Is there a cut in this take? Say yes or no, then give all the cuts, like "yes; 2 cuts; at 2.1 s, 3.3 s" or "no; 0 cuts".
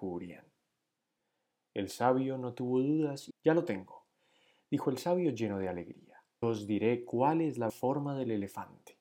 yes; 3 cuts; at 3.3 s, 6.4 s, 7.7 s